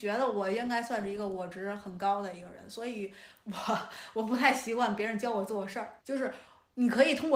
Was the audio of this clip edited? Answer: yes; 1 cut; at 6.0 s

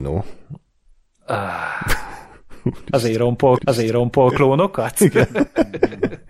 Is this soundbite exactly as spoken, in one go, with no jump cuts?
no; 1 cut; at 3.6 s

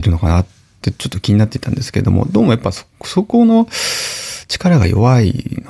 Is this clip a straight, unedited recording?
no; 1 cut; at 2.9 s

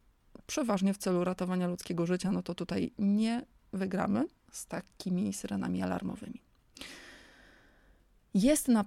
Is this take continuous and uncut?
yes; 0 cuts

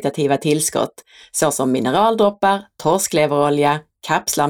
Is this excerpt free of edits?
yes; 0 cuts

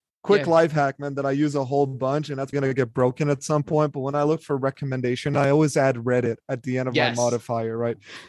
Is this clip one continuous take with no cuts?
no; 1 cut; at 2.5 s

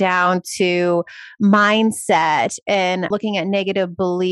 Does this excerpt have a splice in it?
no; 0 cuts

